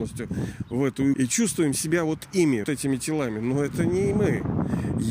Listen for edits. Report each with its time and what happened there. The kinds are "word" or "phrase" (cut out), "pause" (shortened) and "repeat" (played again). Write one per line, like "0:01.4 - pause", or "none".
0:01.1 - word
0:02.6 - word